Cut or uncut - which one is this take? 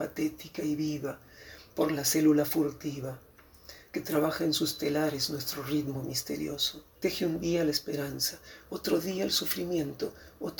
cut